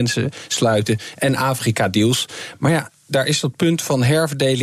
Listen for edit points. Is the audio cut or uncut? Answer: uncut